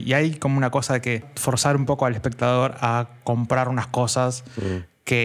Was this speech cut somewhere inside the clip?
no; 0 cuts

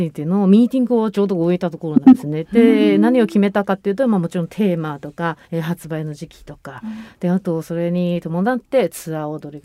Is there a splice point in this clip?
yes; 1 cut; at 5.4 s

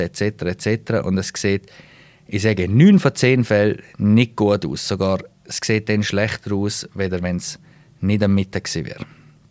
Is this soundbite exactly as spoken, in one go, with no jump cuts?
yes; 0 cuts

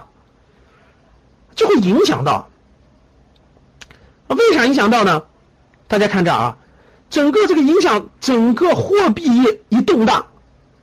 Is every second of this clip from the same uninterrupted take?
yes; 0 cuts

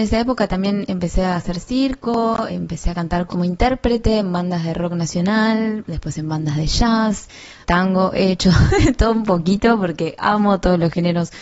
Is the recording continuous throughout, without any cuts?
no; 3 cuts; at 2.5 s, 3.3 s, 7.6 s

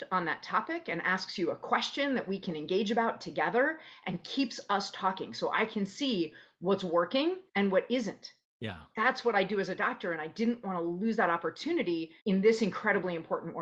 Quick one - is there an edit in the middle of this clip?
yes; 3 cuts; at 7.5 s, 8.4 s, 12.2 s

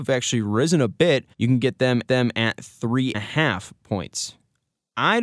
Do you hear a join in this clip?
yes; 3 cuts; at 1.3 s, 2.0 s, 3.1 s

